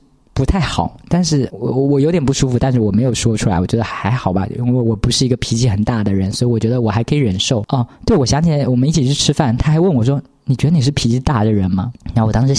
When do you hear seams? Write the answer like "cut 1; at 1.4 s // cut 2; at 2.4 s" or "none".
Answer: cut 1; at 1.5 s